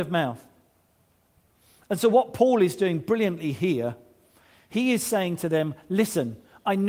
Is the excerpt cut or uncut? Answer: uncut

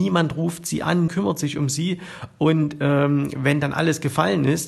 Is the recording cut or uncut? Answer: cut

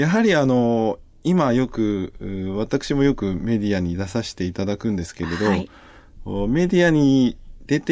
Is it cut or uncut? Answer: uncut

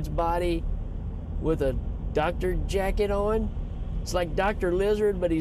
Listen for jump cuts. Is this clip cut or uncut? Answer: uncut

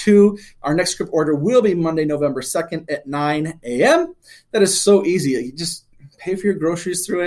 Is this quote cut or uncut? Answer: uncut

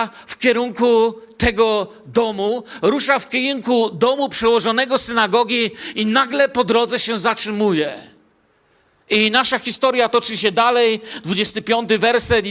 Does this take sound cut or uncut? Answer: uncut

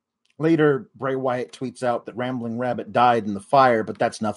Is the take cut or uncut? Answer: uncut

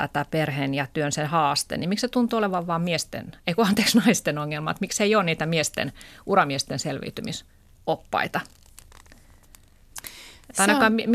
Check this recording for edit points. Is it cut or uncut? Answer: uncut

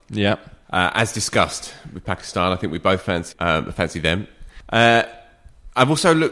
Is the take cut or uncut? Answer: cut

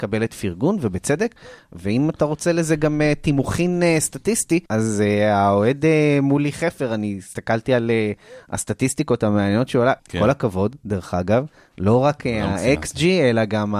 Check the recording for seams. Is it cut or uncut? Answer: cut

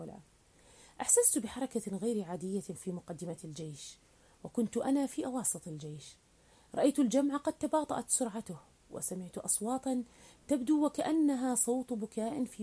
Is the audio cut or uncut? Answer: uncut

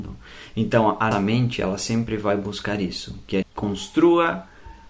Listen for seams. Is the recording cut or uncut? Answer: cut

